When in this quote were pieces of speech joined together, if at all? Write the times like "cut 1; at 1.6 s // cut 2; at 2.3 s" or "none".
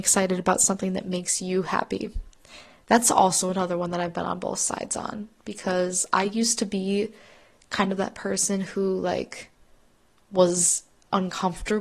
none